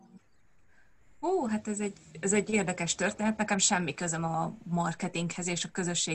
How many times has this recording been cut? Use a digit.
0